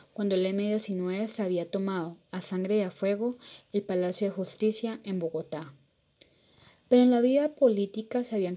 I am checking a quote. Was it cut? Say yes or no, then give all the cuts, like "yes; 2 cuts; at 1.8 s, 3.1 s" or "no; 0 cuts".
no; 0 cuts